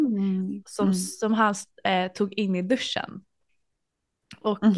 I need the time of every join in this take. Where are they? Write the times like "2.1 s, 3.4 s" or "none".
none